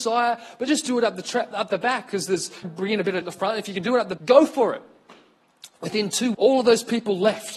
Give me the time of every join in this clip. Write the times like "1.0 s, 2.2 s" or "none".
1.5 s, 2.6 s, 3.2 s, 4.2 s, 6.3 s